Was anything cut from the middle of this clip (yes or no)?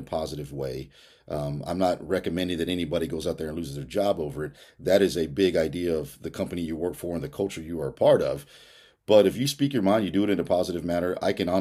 no